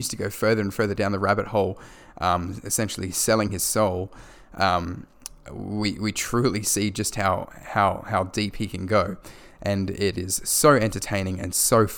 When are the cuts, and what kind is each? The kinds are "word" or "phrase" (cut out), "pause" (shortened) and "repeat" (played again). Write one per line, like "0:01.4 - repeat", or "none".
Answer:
none